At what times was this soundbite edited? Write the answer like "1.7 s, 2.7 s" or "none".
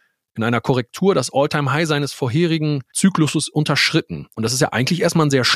2.9 s, 4.3 s